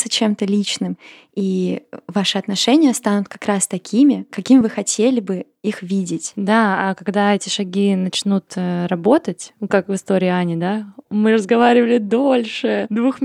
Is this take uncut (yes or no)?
yes